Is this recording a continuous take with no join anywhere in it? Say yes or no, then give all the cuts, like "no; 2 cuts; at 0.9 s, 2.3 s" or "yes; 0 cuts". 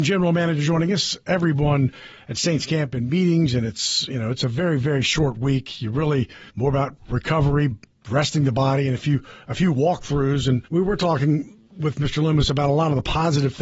no; 3 cuts; at 6.5 s, 10.6 s, 11.6 s